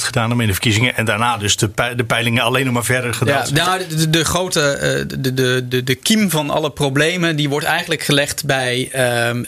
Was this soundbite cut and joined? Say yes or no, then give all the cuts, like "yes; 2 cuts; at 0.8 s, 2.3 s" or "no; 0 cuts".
no; 0 cuts